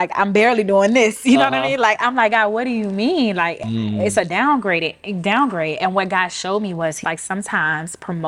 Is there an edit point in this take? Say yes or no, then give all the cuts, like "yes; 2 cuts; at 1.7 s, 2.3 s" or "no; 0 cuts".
yes; 1 cut; at 7.0 s